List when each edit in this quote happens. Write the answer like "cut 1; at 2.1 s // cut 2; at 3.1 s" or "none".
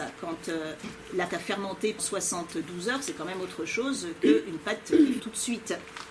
cut 1; at 1.3 s // cut 2; at 2.0 s // cut 3; at 5.2 s